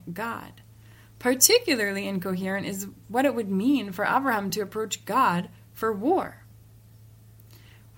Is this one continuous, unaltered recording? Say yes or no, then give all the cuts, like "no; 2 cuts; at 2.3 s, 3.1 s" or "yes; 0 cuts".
yes; 0 cuts